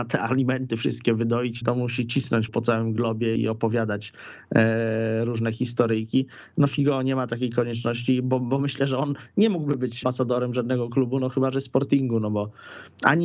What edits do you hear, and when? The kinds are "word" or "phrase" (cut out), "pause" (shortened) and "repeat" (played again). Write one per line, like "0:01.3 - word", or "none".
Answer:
0:01.6 - word
0:02.5 - word
0:03.4 - word
0:10.0 - word